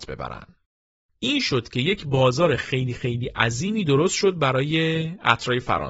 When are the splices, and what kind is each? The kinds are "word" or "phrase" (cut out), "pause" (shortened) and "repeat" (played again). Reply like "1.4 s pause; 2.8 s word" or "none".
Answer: none